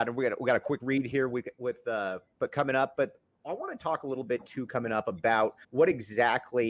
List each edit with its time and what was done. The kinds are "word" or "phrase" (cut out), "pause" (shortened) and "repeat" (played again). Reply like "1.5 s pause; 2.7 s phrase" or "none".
5.6 s pause